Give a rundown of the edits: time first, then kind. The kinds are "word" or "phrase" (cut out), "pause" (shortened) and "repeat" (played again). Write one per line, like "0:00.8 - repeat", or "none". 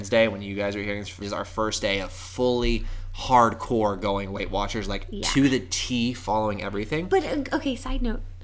0:01.2 - phrase